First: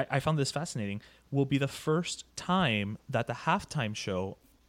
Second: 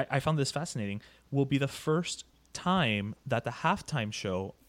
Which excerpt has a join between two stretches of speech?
first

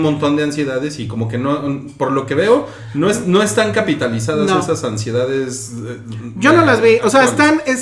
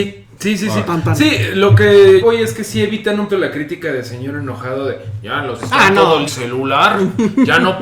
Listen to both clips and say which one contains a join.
second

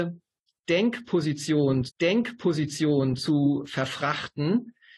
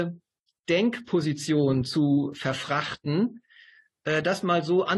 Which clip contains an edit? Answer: first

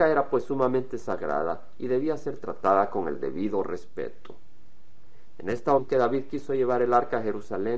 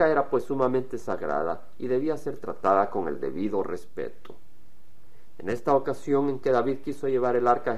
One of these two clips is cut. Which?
first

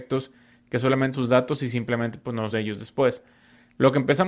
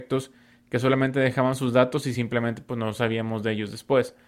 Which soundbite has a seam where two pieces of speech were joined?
first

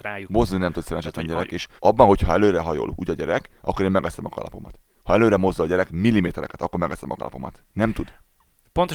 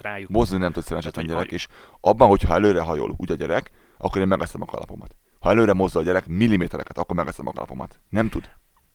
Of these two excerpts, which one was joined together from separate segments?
first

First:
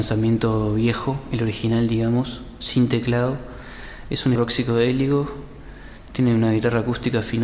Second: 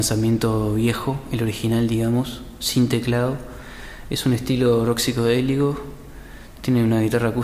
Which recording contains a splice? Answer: first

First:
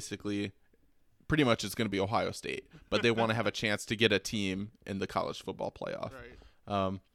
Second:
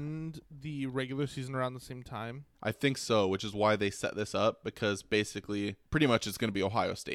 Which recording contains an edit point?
second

